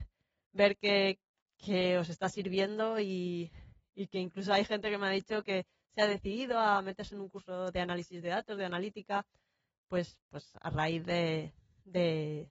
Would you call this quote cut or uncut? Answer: uncut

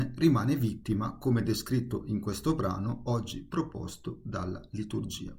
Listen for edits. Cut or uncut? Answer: uncut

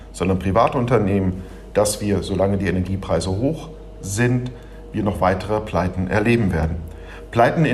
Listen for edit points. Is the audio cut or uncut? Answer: uncut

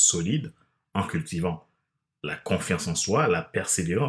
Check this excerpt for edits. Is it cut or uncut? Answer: uncut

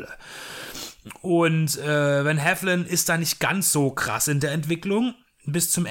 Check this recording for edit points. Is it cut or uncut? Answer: uncut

